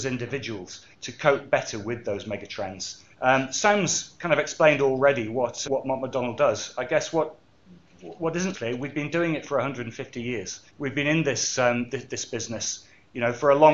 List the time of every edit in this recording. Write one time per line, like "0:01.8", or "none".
0:00.9
0:03.1
0:05.6
0:08.5
0:10.7